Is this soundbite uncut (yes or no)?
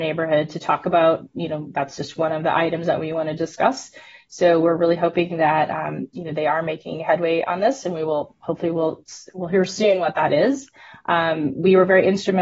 yes